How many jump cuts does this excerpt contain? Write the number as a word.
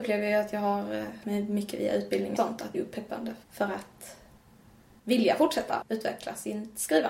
five